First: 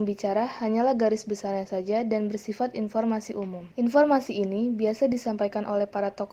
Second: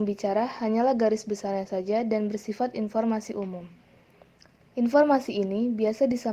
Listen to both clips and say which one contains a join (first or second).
first